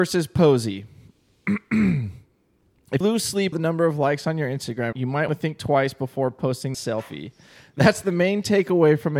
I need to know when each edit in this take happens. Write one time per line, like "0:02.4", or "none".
0:03.0
0:03.5
0:04.9
0:05.3
0:06.7